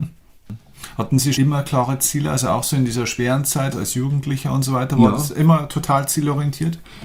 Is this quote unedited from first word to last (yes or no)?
no